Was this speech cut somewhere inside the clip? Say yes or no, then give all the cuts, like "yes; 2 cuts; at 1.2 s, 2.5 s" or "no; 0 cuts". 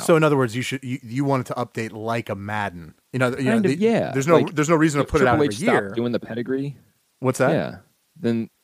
yes; 2 cuts; at 3.0 s, 7.0 s